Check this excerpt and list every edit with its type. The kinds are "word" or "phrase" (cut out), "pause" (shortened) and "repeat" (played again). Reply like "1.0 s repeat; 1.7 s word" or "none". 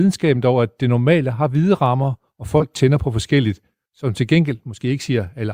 none